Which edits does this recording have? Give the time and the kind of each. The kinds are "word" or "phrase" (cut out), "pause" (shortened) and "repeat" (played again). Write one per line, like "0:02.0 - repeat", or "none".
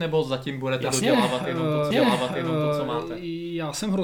0:01.9 - repeat